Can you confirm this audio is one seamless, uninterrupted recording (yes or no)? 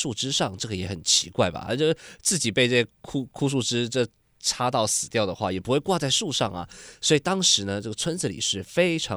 yes